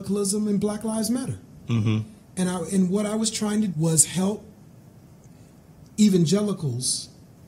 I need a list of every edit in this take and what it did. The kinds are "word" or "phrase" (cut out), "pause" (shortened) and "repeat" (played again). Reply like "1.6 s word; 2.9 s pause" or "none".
3.7 s word